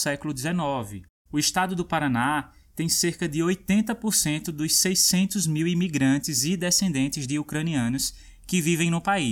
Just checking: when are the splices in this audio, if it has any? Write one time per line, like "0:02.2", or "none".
none